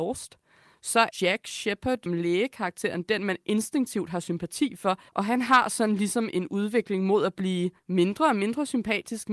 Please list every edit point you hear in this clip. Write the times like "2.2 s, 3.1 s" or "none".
1.1 s, 2.1 s, 5.1 s, 7.8 s

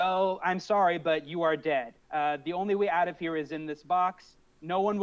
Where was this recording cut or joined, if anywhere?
2.0 s

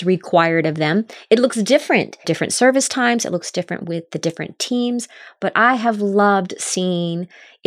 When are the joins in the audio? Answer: 2.2 s

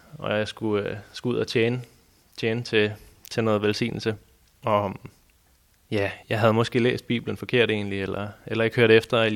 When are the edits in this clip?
6.2 s

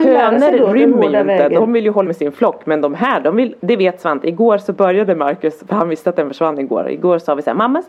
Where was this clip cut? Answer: 2.0 s, 3.6 s

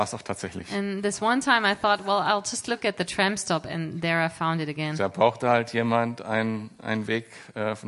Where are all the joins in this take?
none

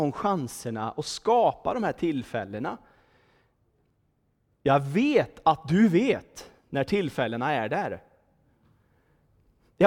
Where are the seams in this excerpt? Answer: none

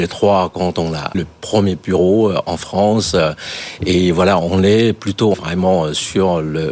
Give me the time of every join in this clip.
1.1 s, 5.3 s

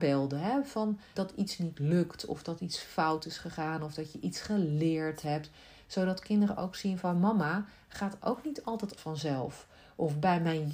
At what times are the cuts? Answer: 1.1 s, 7.0 s, 9.0 s

